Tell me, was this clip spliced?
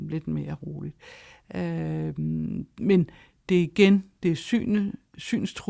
no; 0 cuts

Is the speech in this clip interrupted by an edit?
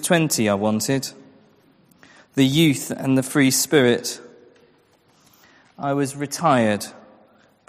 no; 0 cuts

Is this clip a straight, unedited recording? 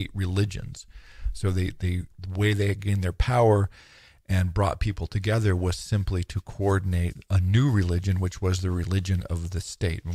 yes; 0 cuts

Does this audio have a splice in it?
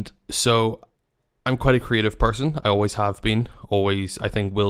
no; 0 cuts

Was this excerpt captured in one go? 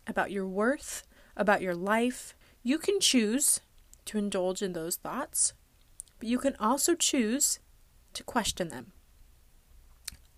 no; 1 cut; at 2.4 s

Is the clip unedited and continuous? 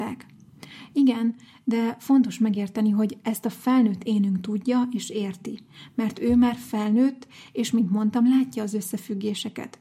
yes; 0 cuts

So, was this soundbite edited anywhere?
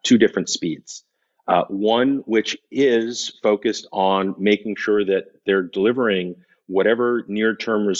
no; 0 cuts

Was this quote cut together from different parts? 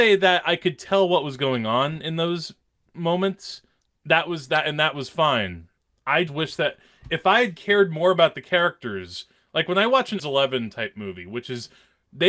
yes; 2 cuts; at 6.3 s, 10.2 s

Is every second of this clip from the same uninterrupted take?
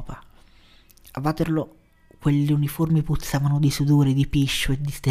yes; 0 cuts

